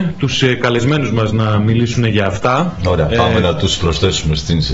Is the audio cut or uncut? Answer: uncut